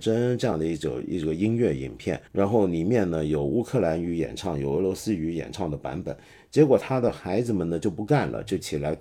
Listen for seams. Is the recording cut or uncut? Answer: cut